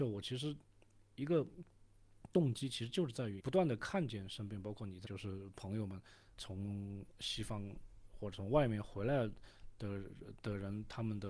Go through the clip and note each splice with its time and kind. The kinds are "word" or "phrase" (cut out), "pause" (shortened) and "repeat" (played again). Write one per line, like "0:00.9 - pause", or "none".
0:03.4 - phrase
0:05.0 - word
0:06.4 - word